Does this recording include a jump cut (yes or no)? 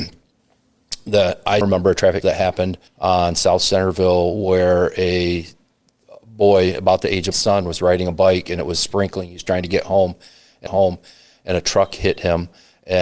yes